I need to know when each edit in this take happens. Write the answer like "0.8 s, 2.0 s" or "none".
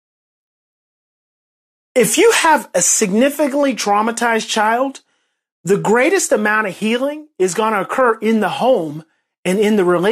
none

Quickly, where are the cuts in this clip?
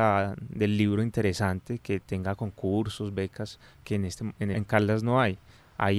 4.5 s

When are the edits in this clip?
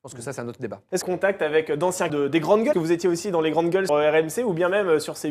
1.0 s, 2.1 s, 2.7 s, 3.9 s

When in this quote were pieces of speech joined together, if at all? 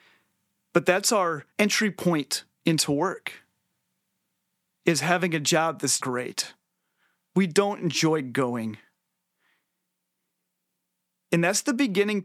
1.5 s, 2.5 s, 6.0 s

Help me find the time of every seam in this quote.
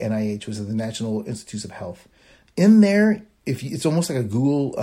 none

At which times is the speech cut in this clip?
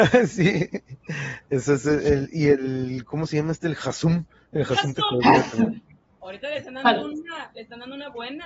none

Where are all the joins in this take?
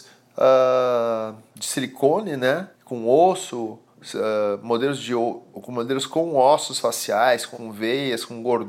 2.7 s, 7.5 s

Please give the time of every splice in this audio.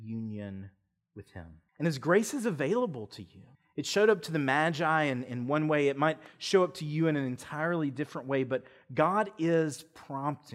1.7 s, 3.5 s

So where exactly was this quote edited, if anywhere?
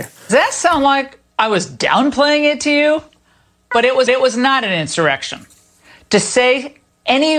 4.1 s

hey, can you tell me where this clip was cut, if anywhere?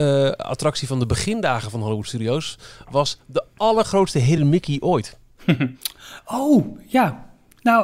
none

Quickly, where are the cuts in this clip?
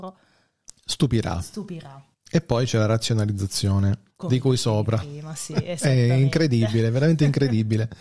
2.1 s, 4.1 s

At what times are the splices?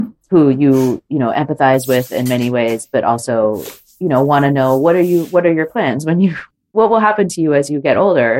none

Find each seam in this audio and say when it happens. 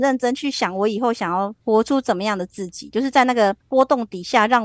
1.6 s, 3.6 s

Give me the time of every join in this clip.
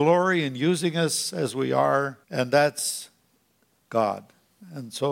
2.2 s

